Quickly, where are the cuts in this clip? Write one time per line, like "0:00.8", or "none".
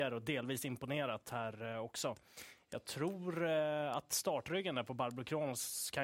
none